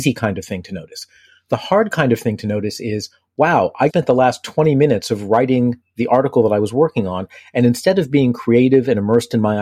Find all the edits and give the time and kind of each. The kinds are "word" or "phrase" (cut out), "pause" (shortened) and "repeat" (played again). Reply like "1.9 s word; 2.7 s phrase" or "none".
3.9 s word